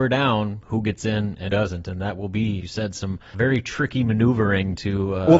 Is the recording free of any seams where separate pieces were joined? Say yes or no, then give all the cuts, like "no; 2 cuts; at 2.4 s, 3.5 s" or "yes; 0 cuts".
no; 3 cuts; at 1.5 s, 2.6 s, 3.3 s